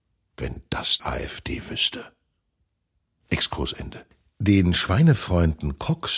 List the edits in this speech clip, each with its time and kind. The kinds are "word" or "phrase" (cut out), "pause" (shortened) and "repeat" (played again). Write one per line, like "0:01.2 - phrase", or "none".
0:01.0 - word